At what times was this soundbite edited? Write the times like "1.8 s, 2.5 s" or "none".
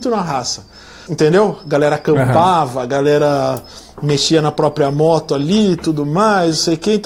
1.1 s